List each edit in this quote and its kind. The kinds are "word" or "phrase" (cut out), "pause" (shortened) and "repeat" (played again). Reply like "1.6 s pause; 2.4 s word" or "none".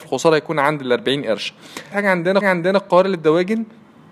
1.9 s word; 2.4 s repeat